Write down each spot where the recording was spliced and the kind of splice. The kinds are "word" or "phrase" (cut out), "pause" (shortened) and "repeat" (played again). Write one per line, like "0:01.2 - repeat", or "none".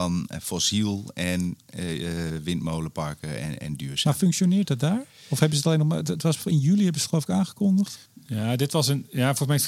0:08.1 - pause

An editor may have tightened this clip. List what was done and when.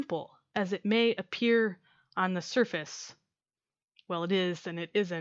none

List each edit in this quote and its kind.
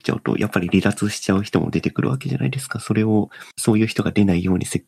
0:03.5 - pause

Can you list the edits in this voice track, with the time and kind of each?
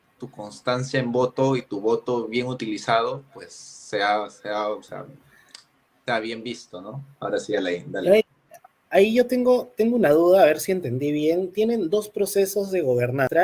none

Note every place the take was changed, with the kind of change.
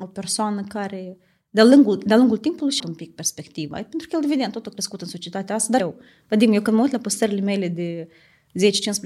0:02.8 - word
0:05.8 - word

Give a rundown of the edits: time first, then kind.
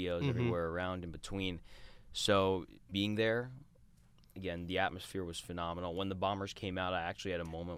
0:02.9 - word

